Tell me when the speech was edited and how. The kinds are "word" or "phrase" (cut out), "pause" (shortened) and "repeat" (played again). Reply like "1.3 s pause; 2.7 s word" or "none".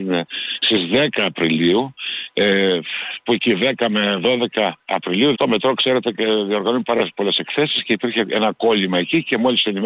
3.3 s word; 5.3 s word